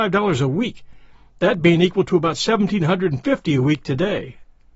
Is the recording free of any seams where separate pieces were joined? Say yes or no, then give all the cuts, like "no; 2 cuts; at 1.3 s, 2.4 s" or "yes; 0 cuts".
yes; 0 cuts